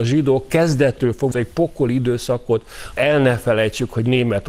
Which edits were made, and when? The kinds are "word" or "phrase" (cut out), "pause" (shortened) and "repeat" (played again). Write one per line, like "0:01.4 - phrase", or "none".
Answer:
0:01.3 - word
0:03.0 - word